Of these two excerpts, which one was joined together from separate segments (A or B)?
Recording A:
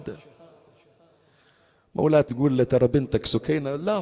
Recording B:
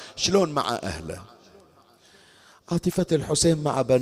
A